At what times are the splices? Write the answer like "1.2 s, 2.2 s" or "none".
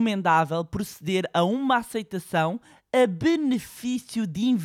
none